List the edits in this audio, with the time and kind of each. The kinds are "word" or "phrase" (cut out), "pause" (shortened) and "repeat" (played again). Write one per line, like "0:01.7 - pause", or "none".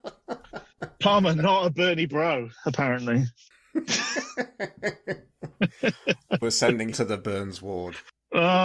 0:02.5 - pause
0:06.4 - word
0:06.9 - word